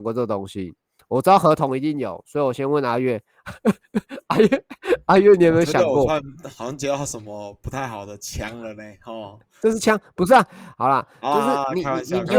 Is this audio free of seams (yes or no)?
yes